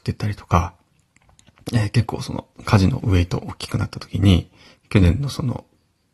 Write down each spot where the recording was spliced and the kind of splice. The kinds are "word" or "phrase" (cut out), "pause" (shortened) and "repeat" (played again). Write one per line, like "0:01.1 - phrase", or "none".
0:02.5 - pause
0:04.7 - pause